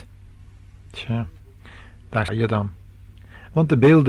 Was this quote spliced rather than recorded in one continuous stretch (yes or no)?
yes